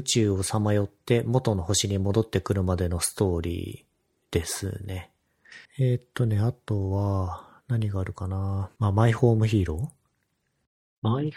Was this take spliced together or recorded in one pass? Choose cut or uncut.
cut